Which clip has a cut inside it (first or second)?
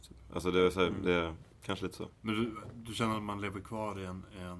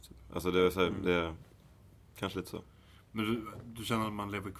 first